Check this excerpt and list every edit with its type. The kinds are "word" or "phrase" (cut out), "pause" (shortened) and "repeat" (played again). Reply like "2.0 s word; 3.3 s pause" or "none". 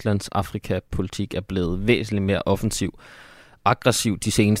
none